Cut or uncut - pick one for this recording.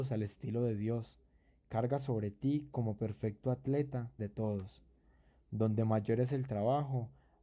cut